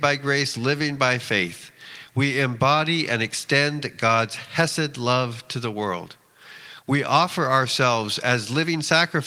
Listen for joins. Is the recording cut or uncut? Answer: uncut